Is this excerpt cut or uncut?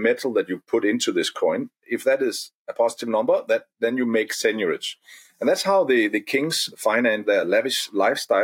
uncut